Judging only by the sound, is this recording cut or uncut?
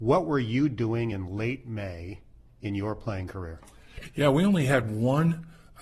uncut